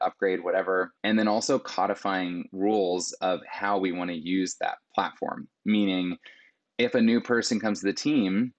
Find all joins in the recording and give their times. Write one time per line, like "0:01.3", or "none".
0:01.0